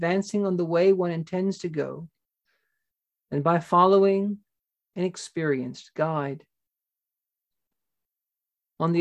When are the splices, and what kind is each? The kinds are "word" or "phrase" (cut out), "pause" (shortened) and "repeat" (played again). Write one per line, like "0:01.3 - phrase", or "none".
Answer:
none